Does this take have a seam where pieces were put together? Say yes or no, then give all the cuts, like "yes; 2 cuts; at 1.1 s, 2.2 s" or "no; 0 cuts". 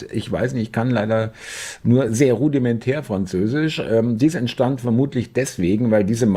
no; 0 cuts